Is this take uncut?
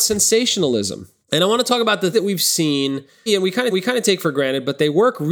no; 4 cuts; at 1.2 s, 2.1 s, 3.3 s, 3.7 s

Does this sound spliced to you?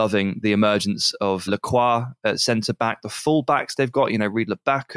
yes; 1 cut; at 1.5 s

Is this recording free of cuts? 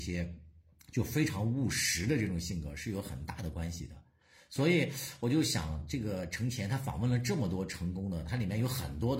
yes; 0 cuts

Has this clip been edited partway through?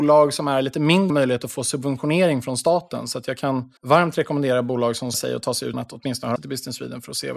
yes; 5 cuts; at 1.1 s, 3.8 s, 5.1 s, 5.7 s, 6.4 s

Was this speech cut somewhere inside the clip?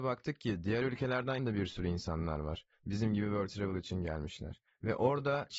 yes; 2 cuts; at 1.4 s, 3.5 s

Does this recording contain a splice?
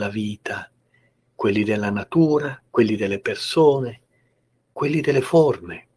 yes; 1 cut; at 2.7 s

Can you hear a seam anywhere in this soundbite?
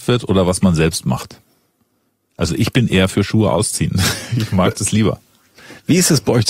no; 0 cuts

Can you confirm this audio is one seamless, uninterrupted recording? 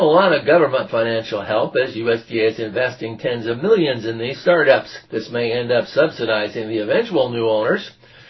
no; 1 cut; at 5.0 s

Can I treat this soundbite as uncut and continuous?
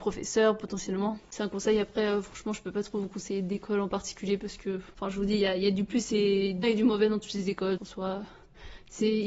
no; 2 cuts; at 6.6 s, 7.8 s

